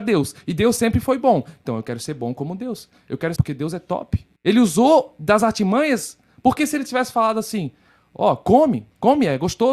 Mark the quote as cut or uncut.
cut